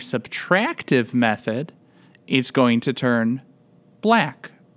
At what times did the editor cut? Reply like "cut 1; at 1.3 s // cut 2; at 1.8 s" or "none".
none